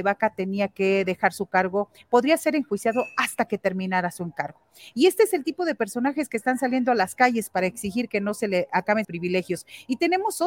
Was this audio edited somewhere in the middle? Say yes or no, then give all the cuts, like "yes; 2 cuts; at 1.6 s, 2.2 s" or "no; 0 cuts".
yes; 1 cut; at 9.0 s